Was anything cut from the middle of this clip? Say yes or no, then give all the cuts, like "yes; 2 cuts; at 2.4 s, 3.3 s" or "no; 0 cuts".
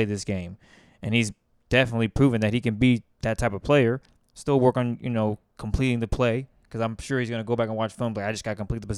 no; 0 cuts